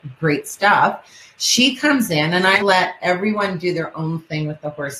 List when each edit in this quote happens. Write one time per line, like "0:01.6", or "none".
0:02.6